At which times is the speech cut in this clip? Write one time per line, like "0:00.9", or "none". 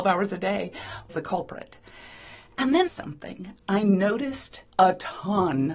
0:01.1
0:02.9
0:04.7